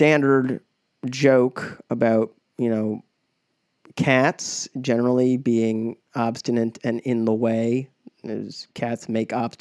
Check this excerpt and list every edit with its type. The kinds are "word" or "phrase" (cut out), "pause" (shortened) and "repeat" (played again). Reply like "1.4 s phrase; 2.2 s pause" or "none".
none